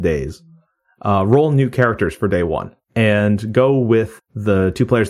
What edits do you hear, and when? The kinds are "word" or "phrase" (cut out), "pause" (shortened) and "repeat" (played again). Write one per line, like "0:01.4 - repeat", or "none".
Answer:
0:02.8 - pause
0:04.2 - word